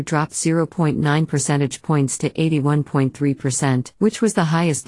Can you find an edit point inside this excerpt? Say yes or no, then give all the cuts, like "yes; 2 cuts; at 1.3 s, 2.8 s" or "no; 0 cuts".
yes; 1 cut; at 4.0 s